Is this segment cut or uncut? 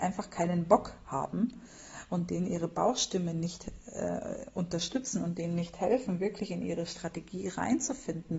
uncut